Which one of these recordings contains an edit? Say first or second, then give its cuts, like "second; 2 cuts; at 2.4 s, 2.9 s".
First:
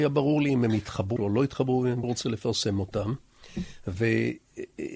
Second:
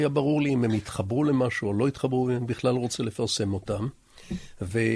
first; 2 cuts; at 1.2 s, 2.0 s